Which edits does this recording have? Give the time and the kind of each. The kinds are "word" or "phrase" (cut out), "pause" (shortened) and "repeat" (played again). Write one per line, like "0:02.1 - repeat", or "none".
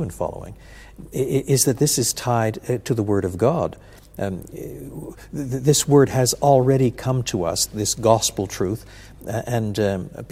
0:07.7 - word